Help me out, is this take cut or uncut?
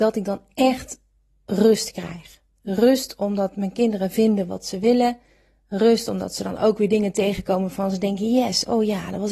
uncut